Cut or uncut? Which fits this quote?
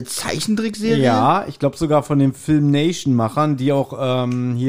uncut